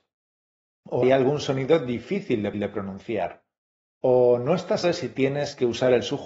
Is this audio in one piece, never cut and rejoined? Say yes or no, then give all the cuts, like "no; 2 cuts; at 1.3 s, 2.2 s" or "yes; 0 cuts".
no; 3 cuts; at 1.0 s, 2.5 s, 4.8 s